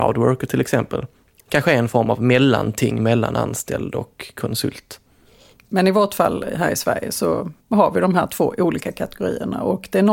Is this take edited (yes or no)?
yes